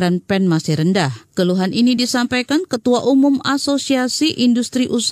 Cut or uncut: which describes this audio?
uncut